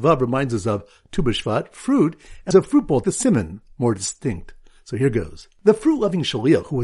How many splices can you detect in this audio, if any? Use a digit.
2